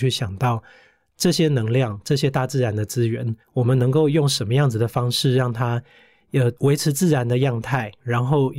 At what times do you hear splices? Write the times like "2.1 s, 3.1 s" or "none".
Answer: 3.4 s, 6.6 s